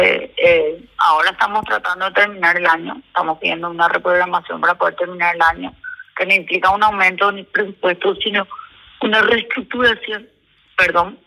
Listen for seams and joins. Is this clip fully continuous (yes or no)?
yes